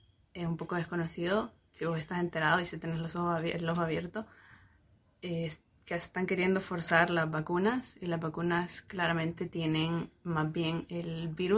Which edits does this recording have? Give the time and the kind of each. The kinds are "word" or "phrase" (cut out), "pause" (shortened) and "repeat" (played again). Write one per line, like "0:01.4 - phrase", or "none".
none